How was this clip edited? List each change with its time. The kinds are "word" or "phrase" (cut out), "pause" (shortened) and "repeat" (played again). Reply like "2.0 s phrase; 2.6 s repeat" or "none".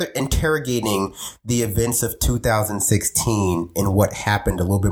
none